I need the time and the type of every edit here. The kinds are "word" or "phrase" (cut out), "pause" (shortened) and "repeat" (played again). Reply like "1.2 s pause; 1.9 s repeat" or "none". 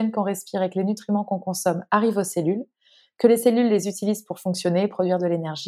none

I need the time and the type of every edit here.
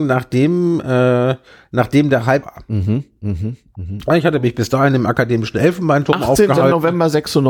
2.4 s phrase

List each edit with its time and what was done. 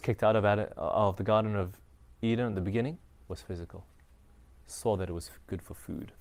none

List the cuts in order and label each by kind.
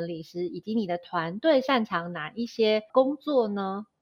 2.9 s pause

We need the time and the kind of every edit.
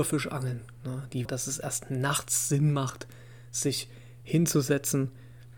1.2 s phrase

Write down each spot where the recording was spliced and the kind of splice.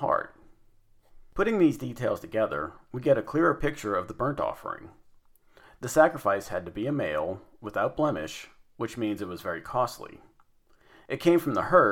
none

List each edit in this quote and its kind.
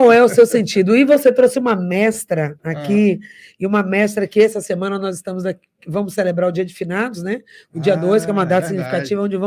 none

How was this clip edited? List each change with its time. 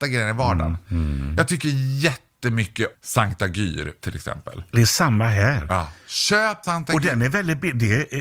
2.9 s word; 4.0 s word; 6.6 s word

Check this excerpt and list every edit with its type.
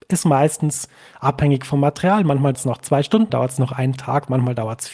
2.5 s word; 3.3 s word

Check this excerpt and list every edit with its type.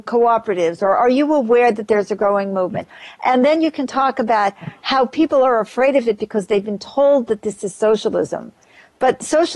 none

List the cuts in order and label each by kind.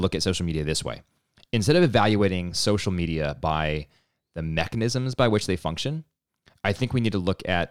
none

